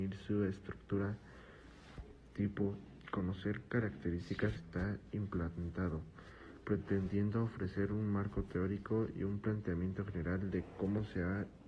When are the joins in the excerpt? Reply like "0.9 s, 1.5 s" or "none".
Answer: 4.6 s